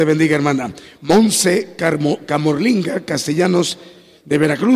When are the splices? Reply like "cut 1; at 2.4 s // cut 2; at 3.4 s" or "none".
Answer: none